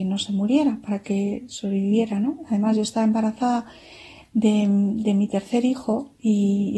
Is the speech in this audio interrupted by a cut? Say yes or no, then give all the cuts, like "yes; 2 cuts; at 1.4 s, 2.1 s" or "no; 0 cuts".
no; 0 cuts